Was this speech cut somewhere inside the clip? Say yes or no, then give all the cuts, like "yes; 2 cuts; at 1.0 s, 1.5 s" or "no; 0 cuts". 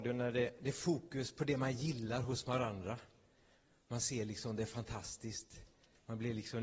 no; 0 cuts